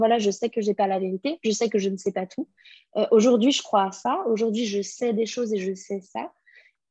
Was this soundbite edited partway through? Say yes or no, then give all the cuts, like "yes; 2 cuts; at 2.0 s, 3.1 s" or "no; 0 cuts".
no; 0 cuts